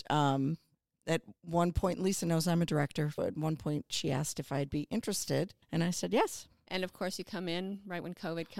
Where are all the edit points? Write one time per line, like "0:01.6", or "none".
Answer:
0:03.2
0:05.6